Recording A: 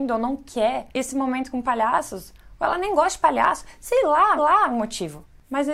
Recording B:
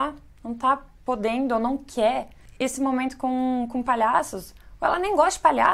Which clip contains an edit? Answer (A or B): A